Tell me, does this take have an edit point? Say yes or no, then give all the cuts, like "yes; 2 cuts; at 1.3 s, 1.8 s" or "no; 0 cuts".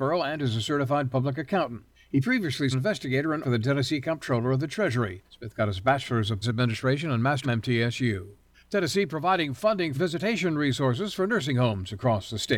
yes; 8 cuts; at 1.9 s, 2.7 s, 3.4 s, 5.3 s, 6.4 s, 7.4 s, 8.5 s, 9.9 s